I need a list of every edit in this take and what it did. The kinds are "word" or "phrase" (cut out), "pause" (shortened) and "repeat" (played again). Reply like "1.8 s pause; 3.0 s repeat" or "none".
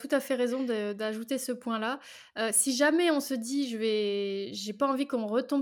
none